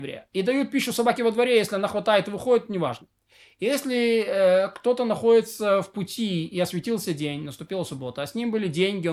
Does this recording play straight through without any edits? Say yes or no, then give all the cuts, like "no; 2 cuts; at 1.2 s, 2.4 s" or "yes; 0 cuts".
yes; 0 cuts